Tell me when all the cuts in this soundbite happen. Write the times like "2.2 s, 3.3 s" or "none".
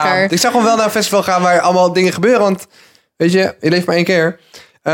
none